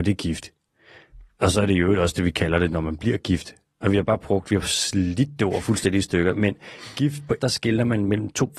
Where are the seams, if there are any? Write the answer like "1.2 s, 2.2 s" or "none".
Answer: 7.4 s